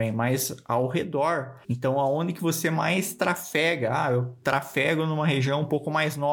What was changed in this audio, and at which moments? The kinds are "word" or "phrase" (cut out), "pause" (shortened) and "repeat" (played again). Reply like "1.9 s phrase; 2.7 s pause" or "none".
1.6 s pause